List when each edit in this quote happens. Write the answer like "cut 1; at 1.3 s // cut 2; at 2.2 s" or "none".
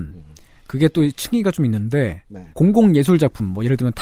cut 1; at 2.5 s